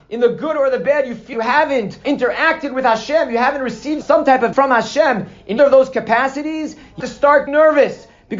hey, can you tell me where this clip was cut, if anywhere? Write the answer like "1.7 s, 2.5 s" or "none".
1.3 s, 2.0 s, 4.0 s, 4.5 s, 5.6 s, 7.0 s, 7.5 s